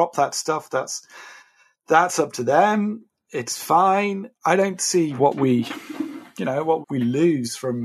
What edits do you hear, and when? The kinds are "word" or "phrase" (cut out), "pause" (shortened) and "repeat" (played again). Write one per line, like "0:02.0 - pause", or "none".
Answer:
0:05.2 - word
0:06.8 - word